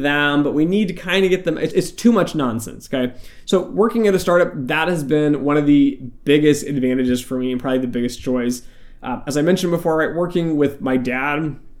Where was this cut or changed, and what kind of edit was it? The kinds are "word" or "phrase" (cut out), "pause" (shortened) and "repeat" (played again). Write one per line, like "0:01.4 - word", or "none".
0:01.7 - word